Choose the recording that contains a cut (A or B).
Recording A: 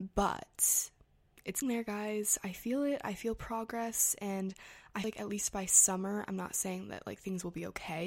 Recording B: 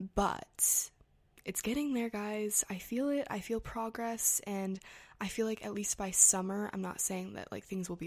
A